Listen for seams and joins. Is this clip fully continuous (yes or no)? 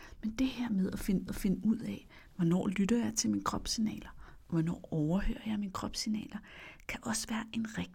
no